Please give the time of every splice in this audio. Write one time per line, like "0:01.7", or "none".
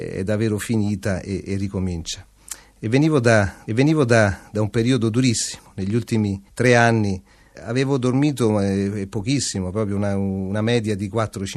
0:03.7
0:06.5
0:07.5